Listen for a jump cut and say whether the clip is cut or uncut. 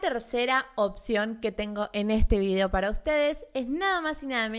uncut